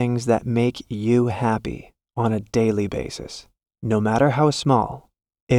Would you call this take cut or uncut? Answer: uncut